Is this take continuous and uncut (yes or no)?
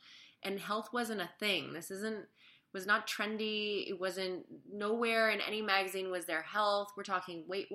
yes